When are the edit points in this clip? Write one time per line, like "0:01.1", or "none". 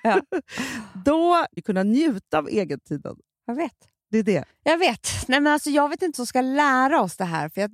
0:01.6
0:04.5
0:06.1